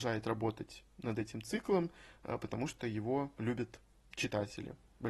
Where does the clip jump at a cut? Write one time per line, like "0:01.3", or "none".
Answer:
none